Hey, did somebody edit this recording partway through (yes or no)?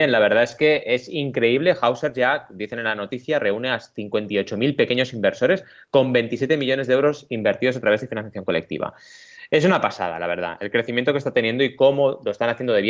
no